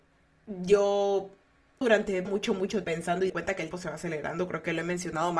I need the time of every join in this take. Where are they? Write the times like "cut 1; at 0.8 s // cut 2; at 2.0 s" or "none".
cut 1; at 1.8 s // cut 2; at 2.3 s // cut 3; at 2.8 s // cut 4; at 3.3 s // cut 5; at 3.7 s